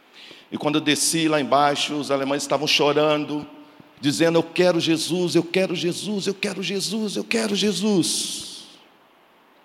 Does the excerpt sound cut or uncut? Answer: uncut